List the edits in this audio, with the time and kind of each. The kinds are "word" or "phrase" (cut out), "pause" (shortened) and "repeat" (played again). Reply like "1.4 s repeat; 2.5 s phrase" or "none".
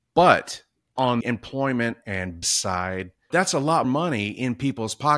1.2 s word; 2.4 s word; 3.3 s word; 3.8 s word